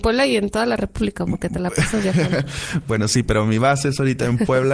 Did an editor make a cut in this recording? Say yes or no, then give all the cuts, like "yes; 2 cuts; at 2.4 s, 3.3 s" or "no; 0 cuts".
no; 0 cuts